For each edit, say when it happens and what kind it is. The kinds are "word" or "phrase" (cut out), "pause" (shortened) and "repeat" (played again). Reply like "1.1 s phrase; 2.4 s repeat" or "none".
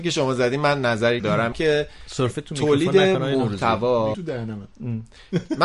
1.2 s word; 1.5 s word; 4.1 s word